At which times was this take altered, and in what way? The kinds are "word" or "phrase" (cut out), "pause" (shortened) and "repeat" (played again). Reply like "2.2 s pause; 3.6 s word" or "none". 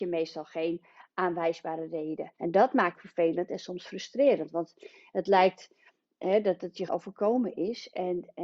2.4 s pause; 3.0 s phrase; 6.9 s word